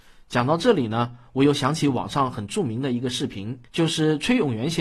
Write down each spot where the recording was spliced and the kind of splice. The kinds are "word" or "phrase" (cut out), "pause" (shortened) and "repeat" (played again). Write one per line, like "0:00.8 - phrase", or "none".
0:03.7 - pause